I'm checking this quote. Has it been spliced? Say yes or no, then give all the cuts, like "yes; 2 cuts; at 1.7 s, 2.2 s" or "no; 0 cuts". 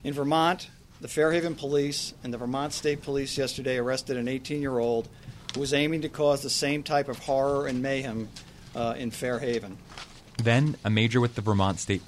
no; 0 cuts